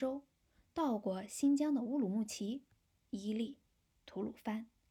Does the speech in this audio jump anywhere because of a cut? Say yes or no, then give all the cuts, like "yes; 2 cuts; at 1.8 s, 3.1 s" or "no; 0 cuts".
no; 0 cuts